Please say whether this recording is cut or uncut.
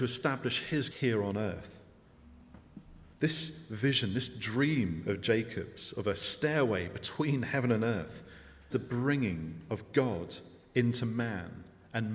cut